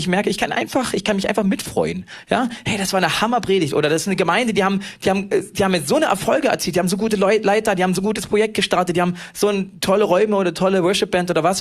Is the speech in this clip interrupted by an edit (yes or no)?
no